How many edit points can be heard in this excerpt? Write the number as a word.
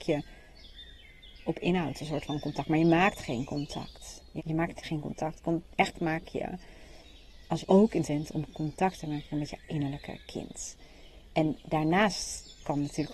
five